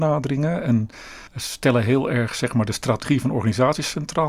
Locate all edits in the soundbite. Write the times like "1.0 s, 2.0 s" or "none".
1.3 s

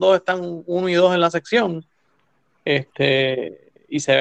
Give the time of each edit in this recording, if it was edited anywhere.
none

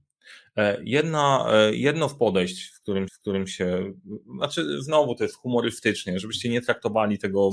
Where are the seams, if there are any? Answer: 3.1 s

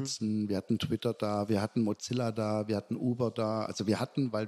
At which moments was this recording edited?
none

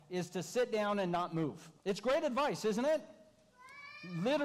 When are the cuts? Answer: 1.8 s

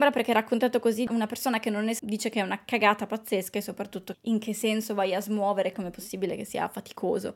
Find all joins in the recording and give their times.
2.0 s, 4.1 s, 5.7 s

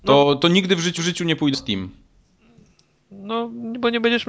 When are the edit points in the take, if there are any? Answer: 1.0 s, 1.5 s

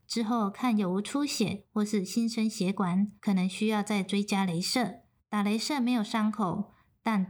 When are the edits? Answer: 3.2 s, 5.2 s

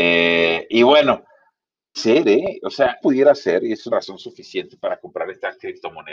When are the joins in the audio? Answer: 1.9 s, 3.0 s, 3.9 s

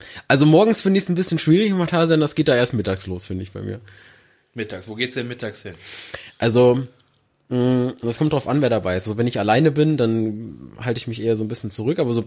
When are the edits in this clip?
none

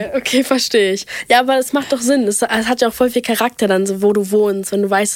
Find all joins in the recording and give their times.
none

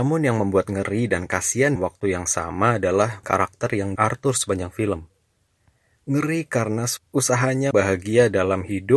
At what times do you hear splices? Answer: 1.8 s, 3.2 s, 4.0 s, 7.7 s

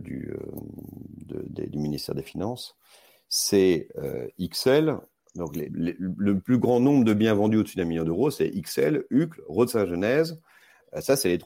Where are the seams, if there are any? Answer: 5.7 s

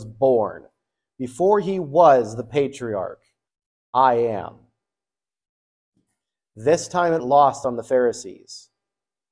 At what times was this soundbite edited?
3.5 s, 7.2 s

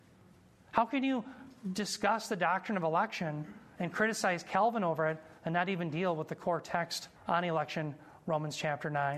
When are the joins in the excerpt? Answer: 5.4 s, 7.2 s

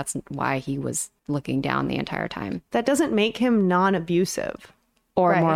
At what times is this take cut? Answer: 1.2 s

